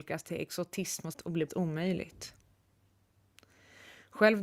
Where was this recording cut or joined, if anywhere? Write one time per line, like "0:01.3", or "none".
0:01.1
0:01.5